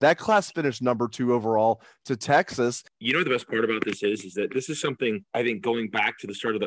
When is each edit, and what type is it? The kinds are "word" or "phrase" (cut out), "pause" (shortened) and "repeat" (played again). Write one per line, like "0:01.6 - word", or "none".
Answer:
0:05.3 - pause